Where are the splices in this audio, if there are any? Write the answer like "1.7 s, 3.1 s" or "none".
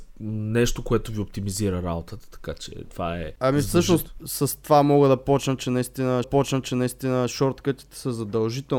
6.2 s